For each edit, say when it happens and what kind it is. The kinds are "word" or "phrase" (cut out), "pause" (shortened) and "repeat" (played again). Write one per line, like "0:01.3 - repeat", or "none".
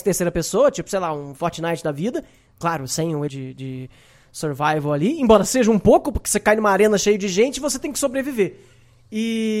0:03.3 - word